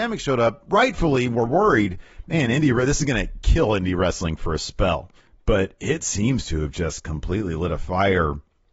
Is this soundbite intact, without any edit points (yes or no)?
no